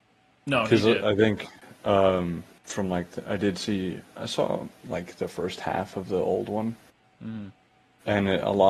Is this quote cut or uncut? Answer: uncut